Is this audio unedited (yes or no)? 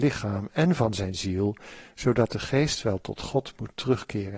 yes